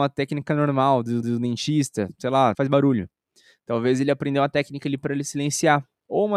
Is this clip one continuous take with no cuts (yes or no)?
no